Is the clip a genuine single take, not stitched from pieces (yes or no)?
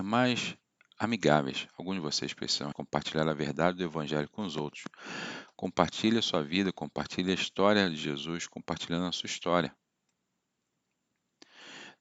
no